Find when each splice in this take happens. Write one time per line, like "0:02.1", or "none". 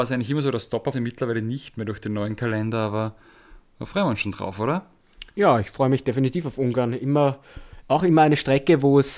0:00.9